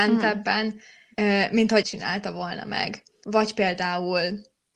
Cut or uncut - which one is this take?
cut